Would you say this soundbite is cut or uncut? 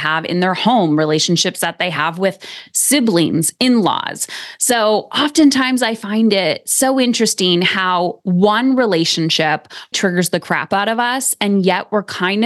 cut